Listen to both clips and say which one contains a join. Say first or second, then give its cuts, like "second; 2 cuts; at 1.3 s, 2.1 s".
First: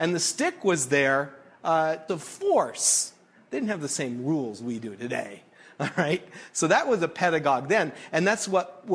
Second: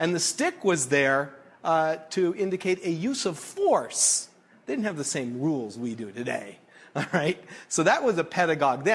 first; 1 cut; at 2.1 s